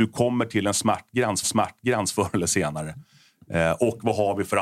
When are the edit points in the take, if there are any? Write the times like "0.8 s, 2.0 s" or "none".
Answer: 1.4 s